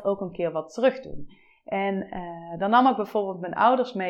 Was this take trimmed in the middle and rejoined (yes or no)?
no